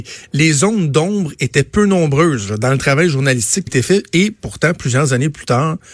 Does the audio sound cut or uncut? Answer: cut